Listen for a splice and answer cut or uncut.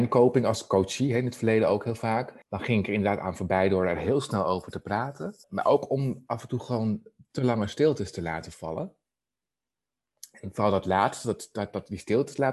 cut